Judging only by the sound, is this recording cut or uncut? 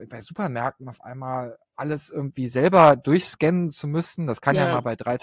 uncut